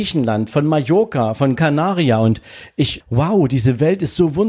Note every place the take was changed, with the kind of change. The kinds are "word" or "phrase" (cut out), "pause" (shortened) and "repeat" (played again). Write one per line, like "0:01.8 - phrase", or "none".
0:01.6 - word
0:03.0 - word